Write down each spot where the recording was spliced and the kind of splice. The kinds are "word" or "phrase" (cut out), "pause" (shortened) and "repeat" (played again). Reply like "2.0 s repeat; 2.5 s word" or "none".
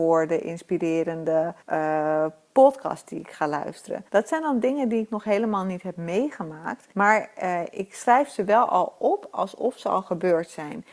1.6 s pause; 4.1 s pause; 6.9 s pause